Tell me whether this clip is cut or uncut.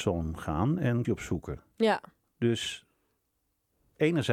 cut